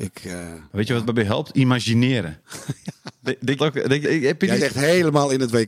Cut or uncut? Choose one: cut